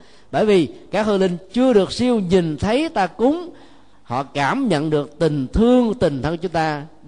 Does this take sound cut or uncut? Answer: uncut